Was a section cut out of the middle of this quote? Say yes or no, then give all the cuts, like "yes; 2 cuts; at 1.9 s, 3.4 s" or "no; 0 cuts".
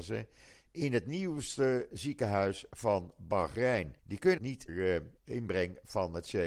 yes; 5 cuts; at 1.9 s, 4.0 s, 4.4 s, 4.7 s, 5.2 s